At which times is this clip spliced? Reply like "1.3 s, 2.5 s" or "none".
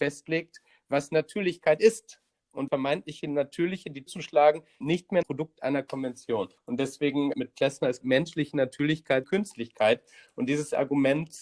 2.7 s, 4.1 s, 4.8 s, 5.2 s, 6.6 s, 7.3 s, 8.0 s, 9.2 s